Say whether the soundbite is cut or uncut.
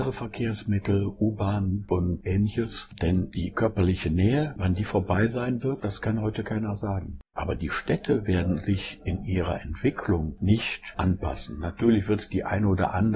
cut